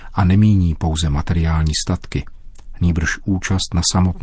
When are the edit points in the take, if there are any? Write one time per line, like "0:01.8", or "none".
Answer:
none